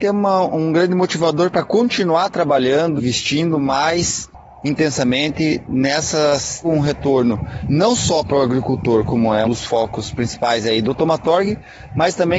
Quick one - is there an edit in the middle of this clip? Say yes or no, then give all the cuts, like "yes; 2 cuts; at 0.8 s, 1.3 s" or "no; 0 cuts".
yes; 3 cuts; at 3.0 s, 6.6 s, 9.4 s